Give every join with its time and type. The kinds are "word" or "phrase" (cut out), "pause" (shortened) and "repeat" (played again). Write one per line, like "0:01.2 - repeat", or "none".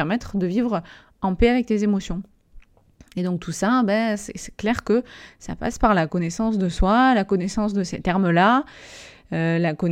none